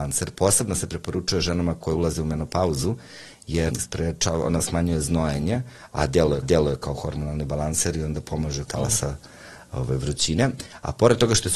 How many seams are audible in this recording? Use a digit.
3